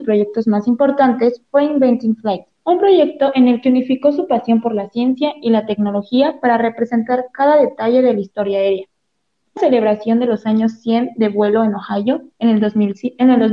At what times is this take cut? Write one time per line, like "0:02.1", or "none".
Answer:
0:02.5
0:09.6